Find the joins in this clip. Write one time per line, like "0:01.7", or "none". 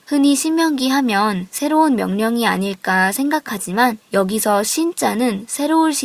0:04.1